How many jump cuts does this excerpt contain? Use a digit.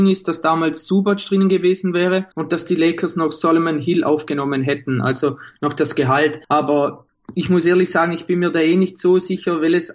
2